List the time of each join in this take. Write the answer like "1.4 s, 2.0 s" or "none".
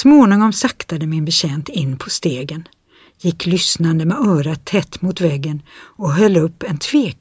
none